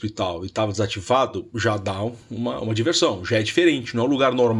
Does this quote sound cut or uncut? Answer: uncut